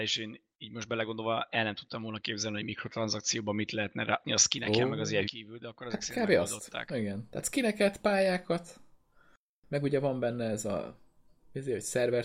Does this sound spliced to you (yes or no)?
yes